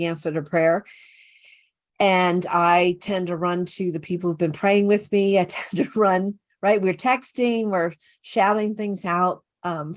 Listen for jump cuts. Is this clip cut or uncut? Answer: uncut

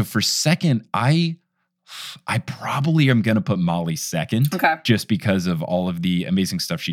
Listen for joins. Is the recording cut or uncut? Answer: uncut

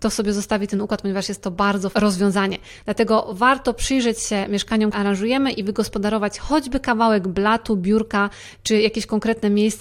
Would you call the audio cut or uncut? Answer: cut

